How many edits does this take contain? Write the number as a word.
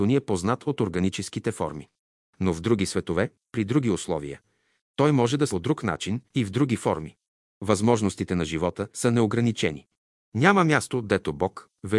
three